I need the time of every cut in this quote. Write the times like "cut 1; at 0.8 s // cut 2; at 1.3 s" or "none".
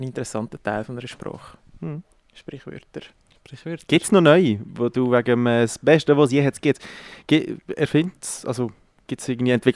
none